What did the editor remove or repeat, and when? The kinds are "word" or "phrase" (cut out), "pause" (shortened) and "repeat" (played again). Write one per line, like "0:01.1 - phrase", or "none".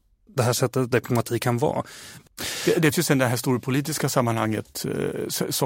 0:00.9 - phrase
0:02.9 - word